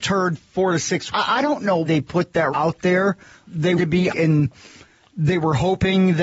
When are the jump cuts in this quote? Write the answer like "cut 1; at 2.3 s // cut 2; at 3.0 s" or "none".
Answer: cut 1; at 1.1 s // cut 2; at 1.8 s // cut 3; at 2.5 s // cut 4; at 3.4 s // cut 5; at 3.8 s // cut 6; at 4.1 s